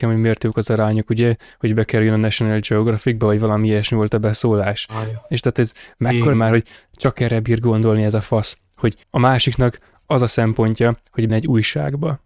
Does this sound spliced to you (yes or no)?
yes